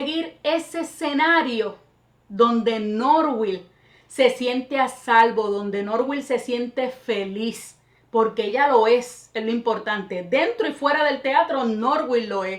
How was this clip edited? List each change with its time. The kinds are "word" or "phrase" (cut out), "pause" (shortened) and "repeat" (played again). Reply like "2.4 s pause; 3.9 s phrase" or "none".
none